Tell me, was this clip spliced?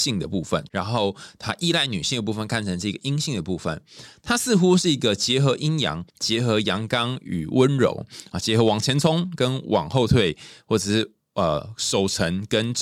yes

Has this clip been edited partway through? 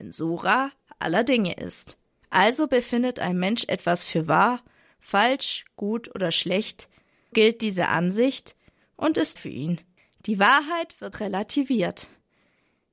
yes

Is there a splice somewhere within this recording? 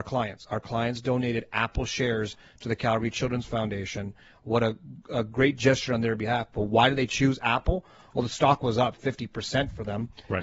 no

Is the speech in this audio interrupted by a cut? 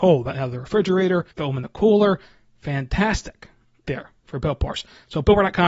yes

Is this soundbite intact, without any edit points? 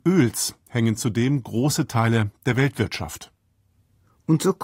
yes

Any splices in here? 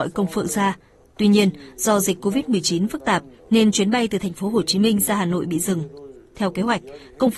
no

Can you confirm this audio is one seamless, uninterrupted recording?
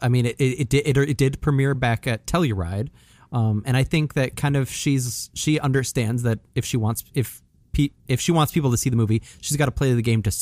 yes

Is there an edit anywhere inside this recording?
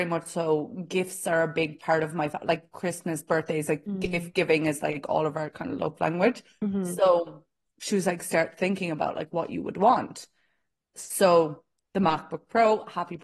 no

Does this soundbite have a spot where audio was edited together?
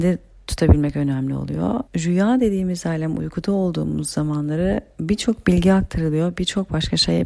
yes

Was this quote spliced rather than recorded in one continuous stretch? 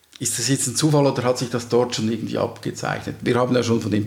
no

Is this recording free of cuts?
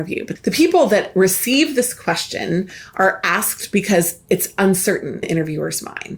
no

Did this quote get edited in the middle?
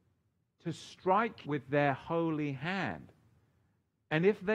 yes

